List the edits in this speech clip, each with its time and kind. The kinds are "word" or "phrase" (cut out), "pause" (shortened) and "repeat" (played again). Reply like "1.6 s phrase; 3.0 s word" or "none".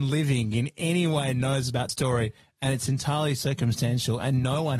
1.9 s word